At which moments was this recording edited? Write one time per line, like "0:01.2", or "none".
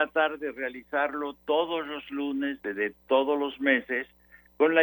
0:02.6